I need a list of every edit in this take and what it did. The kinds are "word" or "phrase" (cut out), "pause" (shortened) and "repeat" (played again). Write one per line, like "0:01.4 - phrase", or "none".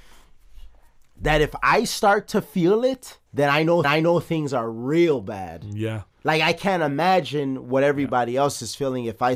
0:03.3 - pause
0:03.8 - repeat
0:06.1 - pause